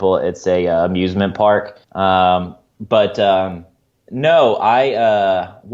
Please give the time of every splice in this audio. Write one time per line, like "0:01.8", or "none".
0:01.8